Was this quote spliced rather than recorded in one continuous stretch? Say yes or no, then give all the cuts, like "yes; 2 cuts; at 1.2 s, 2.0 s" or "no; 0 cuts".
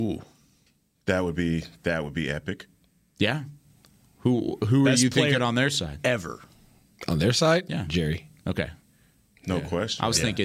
no; 0 cuts